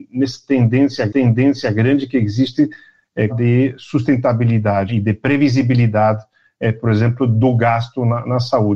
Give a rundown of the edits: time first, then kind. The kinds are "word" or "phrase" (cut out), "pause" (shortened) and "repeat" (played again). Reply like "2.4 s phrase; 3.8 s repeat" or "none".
1.1 s repeat; 3.3 s phrase; 4.9 s word